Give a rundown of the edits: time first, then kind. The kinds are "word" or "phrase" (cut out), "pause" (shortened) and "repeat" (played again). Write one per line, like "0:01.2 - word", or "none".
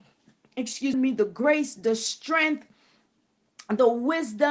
0:00.9 - phrase